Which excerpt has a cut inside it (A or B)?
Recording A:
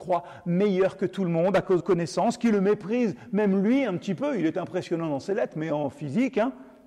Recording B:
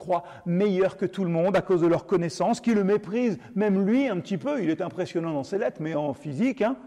A